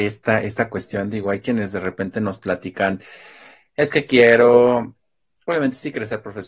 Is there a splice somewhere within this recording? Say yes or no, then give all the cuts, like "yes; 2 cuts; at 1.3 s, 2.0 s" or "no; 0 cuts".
no; 0 cuts